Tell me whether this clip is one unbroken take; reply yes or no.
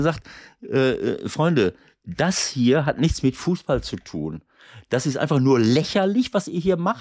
yes